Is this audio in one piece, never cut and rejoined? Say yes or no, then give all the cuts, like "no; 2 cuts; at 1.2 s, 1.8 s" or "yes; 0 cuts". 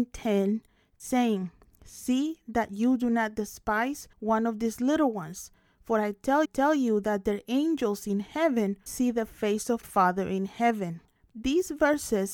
no; 5 cuts; at 4.1 s, 6.4 s, 8.9 s, 9.8 s, 11.2 s